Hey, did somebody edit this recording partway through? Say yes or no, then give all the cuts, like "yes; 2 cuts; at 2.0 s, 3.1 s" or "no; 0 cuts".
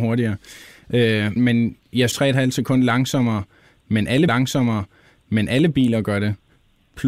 yes; 3 cuts; at 1.4 s, 2.1 s, 4.3 s